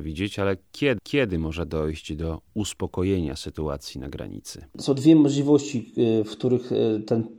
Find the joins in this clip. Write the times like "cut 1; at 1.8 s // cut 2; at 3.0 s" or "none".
cut 1; at 1.0 s